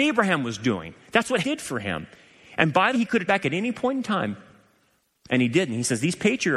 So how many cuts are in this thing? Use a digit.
3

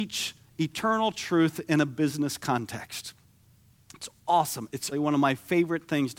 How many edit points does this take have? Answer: 1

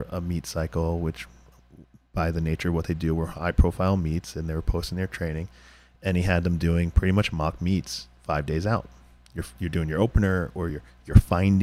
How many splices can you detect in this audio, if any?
0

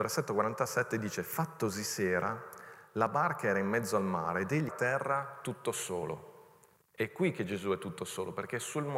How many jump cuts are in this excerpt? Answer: 1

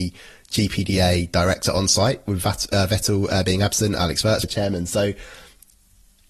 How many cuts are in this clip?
1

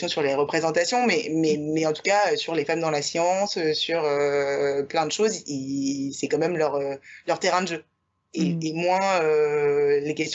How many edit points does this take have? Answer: 0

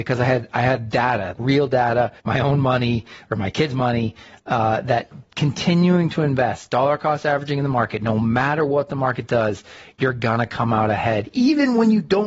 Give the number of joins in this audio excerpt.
2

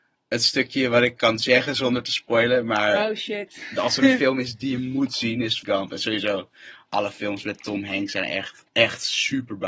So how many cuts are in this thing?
2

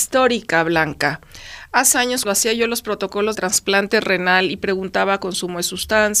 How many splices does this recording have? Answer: 3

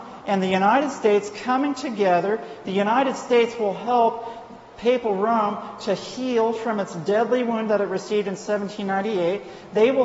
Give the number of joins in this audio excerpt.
0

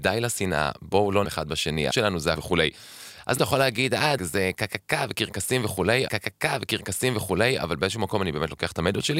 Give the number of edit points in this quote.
6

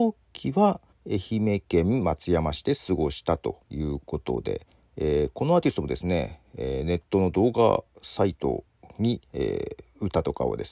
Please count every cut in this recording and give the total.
3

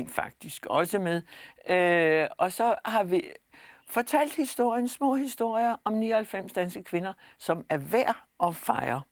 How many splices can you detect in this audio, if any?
0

